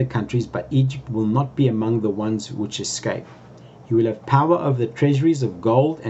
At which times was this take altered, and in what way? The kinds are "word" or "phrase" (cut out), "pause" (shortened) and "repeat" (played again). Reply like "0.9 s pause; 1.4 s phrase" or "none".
1.1 s word